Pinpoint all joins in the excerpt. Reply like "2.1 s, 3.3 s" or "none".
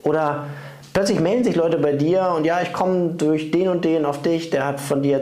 none